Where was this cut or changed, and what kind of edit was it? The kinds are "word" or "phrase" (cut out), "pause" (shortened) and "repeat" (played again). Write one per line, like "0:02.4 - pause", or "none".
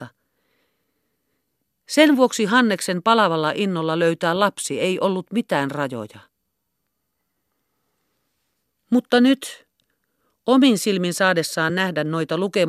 none